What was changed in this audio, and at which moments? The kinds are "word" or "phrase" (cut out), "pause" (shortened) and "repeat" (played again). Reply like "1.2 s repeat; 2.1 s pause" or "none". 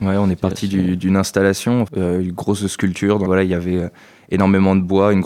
1.9 s word; 3.3 s word